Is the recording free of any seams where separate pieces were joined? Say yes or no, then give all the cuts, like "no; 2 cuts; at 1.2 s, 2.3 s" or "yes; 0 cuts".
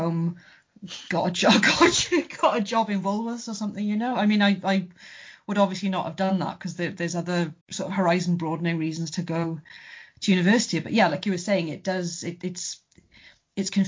no; 1 cut; at 7.6 s